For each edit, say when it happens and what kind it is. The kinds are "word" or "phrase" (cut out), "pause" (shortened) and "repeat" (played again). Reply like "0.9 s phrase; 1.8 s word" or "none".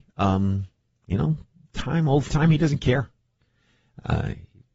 2.3 s word